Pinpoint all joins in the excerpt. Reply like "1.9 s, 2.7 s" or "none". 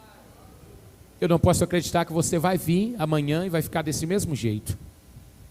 none